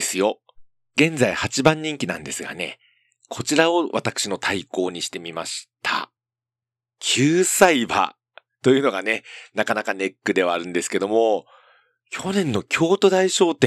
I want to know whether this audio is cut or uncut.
uncut